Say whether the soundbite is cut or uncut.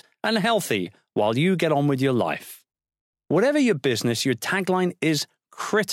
uncut